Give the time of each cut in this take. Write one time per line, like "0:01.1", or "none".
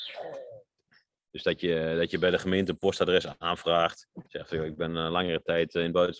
0:04.3